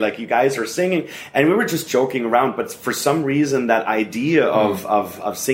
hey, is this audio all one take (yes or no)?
yes